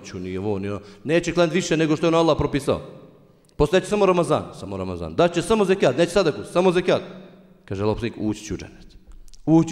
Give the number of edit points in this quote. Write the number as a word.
zero